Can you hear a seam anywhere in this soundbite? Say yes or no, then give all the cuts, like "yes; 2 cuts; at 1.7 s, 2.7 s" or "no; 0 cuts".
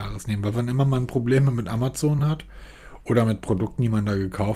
no; 0 cuts